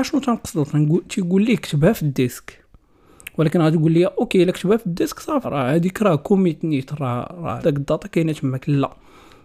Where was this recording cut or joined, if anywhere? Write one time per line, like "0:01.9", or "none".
0:05.4
0:07.6